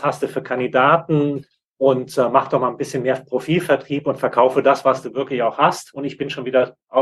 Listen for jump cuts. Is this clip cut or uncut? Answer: uncut